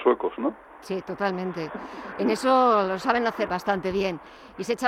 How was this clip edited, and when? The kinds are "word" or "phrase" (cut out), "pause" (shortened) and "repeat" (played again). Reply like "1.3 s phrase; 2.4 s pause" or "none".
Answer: 3.5 s word